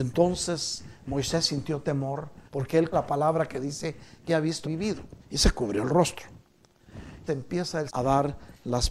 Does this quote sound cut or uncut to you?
cut